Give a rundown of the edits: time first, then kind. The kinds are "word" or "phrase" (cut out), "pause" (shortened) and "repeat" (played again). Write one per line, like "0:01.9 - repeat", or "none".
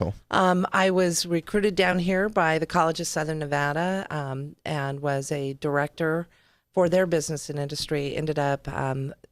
none